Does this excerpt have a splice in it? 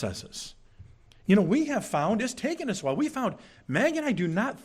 no; 0 cuts

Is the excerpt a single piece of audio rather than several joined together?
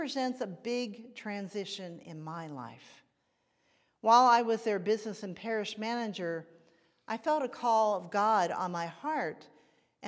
yes; 0 cuts

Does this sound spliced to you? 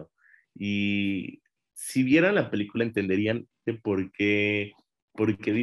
yes; 1 cut; at 3.7 s

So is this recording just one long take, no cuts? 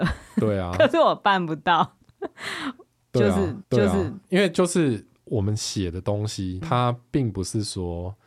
no; 2 cuts; at 3.6 s, 6.6 s

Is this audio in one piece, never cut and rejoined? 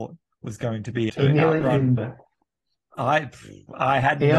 no; 2 cuts; at 1.1 s, 2.0 s

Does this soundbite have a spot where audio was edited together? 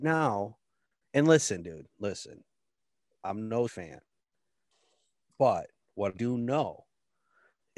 yes; 2 cuts; at 3.7 s, 6.1 s

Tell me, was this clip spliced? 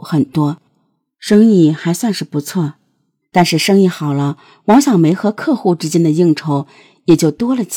no; 0 cuts

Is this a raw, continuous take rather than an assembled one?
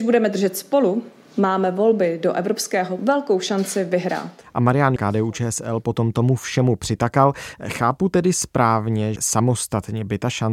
no; 3 cuts; at 3.0 s, 5.0 s, 9.2 s

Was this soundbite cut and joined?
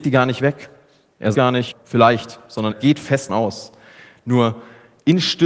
yes; 4 cuts; at 1.3 s, 1.7 s, 2.7 s, 3.3 s

